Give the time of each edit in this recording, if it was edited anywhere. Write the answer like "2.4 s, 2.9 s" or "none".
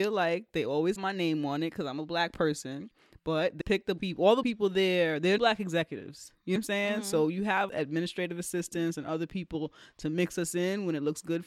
1.0 s, 3.6 s, 4.0 s, 4.4 s, 5.4 s, 6.6 s, 7.7 s